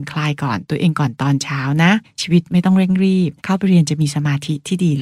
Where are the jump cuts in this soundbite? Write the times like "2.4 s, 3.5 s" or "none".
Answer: 2.0 s, 3.4 s